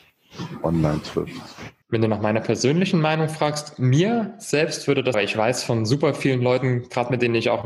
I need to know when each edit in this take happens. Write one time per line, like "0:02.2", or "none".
0:01.8
0:05.1